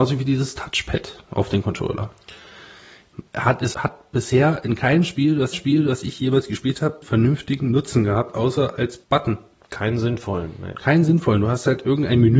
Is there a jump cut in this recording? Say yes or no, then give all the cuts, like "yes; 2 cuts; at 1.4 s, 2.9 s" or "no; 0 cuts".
yes; 5 cuts; at 3.3 s, 3.7 s, 5.5 s, 7.0 s, 9.0 s